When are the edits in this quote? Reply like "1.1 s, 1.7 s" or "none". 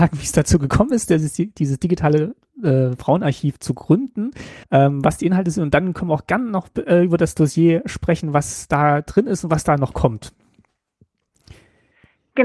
4.6 s